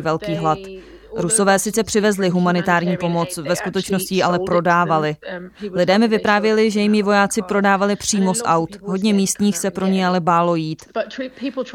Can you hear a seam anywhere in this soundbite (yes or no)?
no